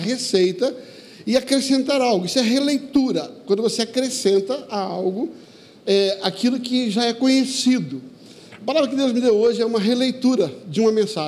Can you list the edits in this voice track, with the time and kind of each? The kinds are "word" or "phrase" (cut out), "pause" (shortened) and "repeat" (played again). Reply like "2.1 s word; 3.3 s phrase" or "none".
none